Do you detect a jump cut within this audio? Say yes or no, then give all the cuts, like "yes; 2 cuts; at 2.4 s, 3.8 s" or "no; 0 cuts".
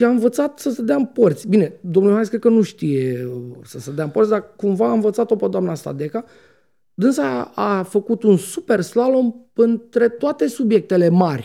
no; 0 cuts